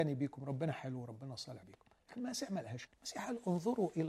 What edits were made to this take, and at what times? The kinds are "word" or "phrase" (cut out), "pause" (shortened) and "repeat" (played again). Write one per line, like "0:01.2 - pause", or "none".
0:01.6 - word
0:02.9 - word